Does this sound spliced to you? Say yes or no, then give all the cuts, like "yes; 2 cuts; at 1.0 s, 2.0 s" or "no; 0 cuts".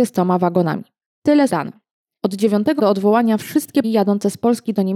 yes; 3 cuts; at 1.5 s, 2.8 s, 3.8 s